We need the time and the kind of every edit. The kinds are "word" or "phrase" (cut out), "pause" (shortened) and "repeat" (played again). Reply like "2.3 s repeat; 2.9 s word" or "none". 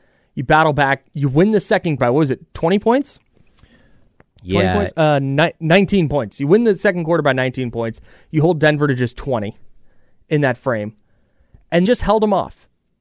2.0 s word; 11.9 s word